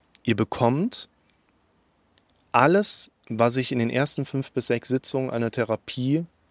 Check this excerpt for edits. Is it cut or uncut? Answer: uncut